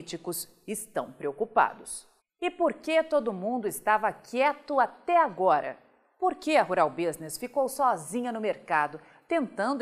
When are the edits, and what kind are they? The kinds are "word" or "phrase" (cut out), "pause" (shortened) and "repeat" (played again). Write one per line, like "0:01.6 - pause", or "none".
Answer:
0:02.2 - pause